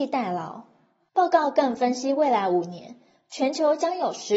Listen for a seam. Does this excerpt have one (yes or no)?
no